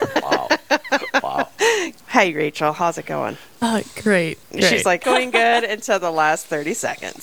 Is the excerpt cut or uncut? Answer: cut